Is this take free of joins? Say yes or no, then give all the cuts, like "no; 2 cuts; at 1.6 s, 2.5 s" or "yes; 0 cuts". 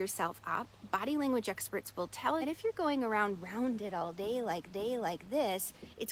no; 2 cuts; at 2.4 s, 4.7 s